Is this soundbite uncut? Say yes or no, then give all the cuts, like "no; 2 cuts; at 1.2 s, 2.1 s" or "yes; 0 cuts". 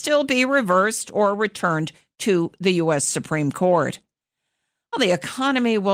yes; 0 cuts